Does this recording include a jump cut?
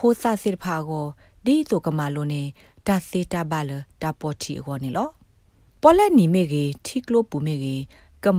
no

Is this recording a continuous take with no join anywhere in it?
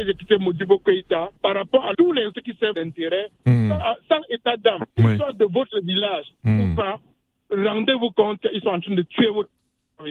no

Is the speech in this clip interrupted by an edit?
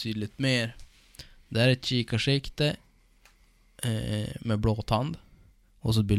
no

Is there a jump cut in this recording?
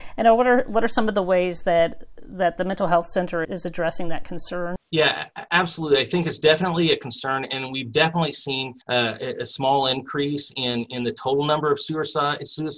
yes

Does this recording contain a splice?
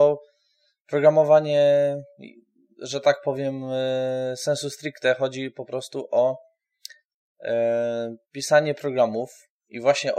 no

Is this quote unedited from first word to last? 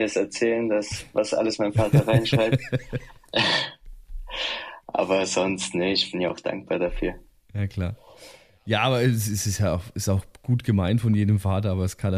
yes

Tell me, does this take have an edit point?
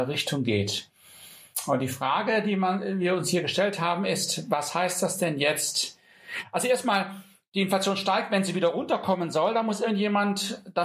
no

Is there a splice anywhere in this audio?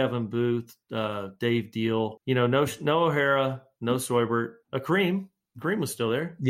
no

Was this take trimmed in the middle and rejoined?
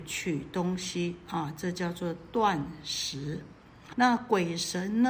yes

